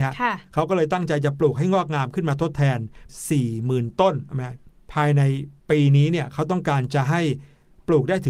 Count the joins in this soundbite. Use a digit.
1